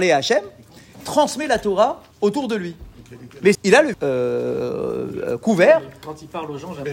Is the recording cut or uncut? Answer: cut